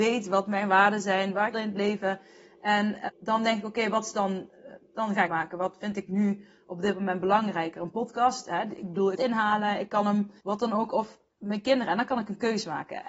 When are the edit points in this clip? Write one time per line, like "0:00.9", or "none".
0:01.5
0:03.1
0:05.3
0:09.1
0:10.4
0:11.3